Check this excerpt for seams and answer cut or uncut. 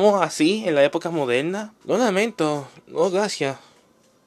cut